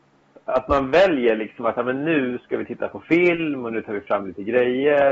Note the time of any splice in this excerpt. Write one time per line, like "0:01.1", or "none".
none